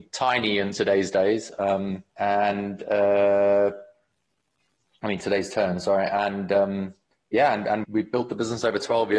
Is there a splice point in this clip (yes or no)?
yes